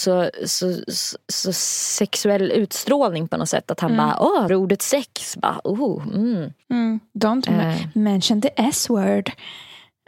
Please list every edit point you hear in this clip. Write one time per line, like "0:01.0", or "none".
0:04.5

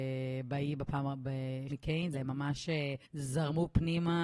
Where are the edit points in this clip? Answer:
0:01.7
0:02.1
0:03.0

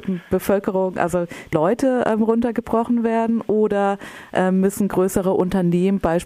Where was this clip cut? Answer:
0:01.5

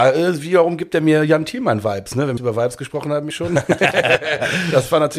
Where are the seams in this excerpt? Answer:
0:02.4
0:03.3

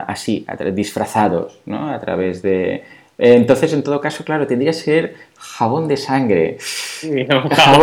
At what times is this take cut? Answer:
none

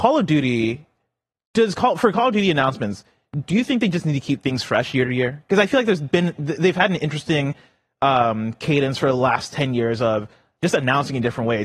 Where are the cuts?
none

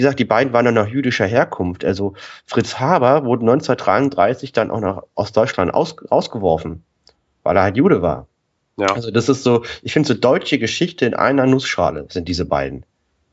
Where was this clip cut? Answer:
none

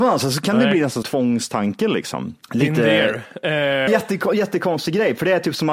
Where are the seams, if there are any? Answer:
0:01.0
0:02.4
0:03.9

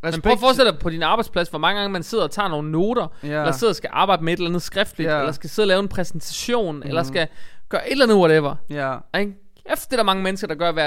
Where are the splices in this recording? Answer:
none

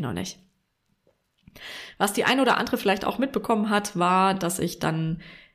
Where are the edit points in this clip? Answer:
none

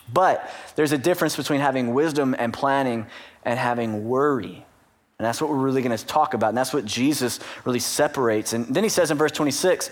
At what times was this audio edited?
none

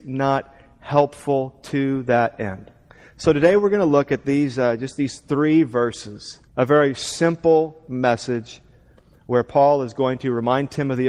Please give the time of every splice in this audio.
0:02.9
0:06.5

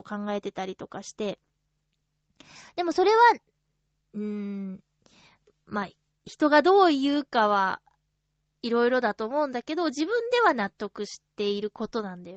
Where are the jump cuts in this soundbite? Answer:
none

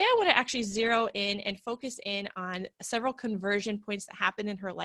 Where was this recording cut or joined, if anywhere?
none

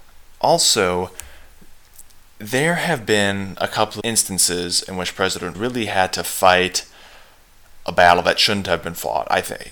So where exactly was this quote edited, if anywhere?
0:04.0
0:05.5

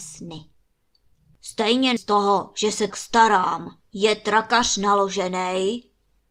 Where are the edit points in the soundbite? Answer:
0:02.0
0:02.9
0:03.8

